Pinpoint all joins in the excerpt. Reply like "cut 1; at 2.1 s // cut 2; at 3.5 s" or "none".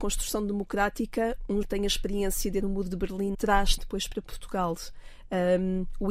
cut 1; at 1.6 s // cut 2; at 2.6 s // cut 3; at 3.3 s // cut 4; at 3.8 s